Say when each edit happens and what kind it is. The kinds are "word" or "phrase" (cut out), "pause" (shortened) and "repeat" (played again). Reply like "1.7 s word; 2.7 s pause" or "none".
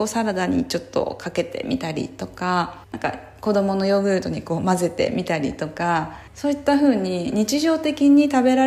2.8 s pause; 6.3 s pause